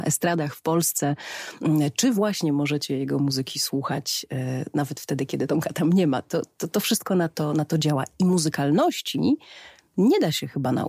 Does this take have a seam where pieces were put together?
no; 0 cuts

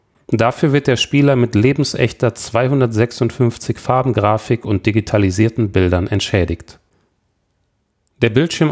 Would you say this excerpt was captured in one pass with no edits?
yes; 0 cuts

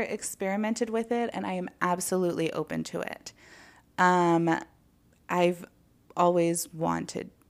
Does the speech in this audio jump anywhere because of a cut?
no; 0 cuts

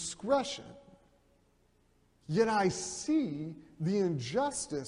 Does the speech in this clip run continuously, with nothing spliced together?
yes; 0 cuts

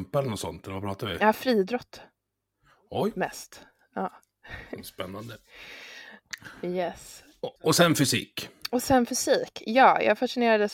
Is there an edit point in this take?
yes; 1 cut; at 7.6 s

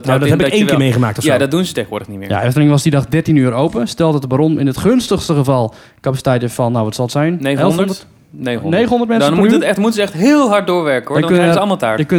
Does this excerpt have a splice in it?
no; 0 cuts

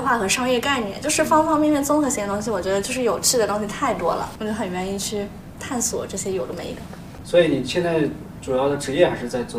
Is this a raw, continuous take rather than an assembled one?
no; 1 cut; at 5.6 s

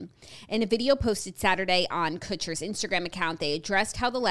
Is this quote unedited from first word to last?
yes; 0 cuts

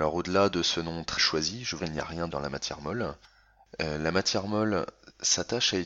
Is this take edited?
yes; 3 cuts; at 1.2 s, 1.8 s, 2.3 s

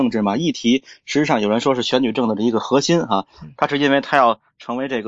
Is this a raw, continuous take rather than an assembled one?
yes; 0 cuts

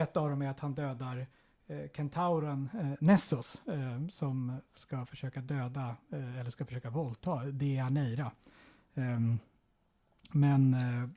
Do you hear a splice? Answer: no; 0 cuts

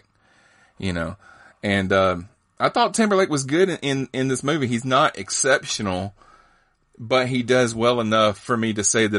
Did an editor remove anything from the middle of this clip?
no; 0 cuts

